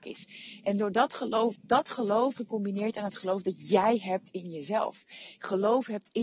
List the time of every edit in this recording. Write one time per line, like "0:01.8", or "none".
0:02.4